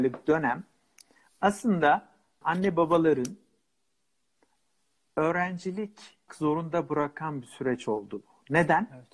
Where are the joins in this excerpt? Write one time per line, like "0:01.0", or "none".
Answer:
0:02.4
0:06.3